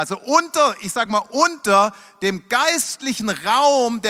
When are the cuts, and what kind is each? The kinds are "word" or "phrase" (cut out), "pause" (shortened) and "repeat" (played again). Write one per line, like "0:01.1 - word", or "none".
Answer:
none